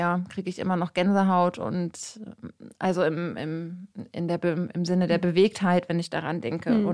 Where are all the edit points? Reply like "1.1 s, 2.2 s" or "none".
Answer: none